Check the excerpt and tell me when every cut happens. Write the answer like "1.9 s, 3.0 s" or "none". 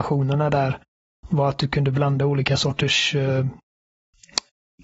none

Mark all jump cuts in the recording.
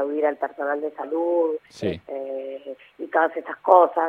1.6 s

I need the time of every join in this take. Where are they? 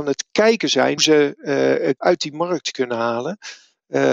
1.0 s, 2.0 s

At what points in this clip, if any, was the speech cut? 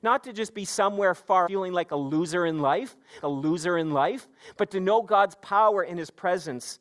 1.5 s, 3.2 s

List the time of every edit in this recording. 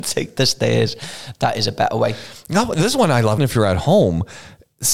3.4 s

